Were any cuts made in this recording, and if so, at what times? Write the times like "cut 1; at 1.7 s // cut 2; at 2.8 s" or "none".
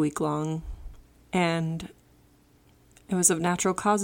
none